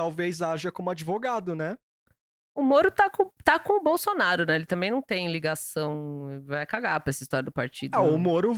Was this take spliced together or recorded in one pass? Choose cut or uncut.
uncut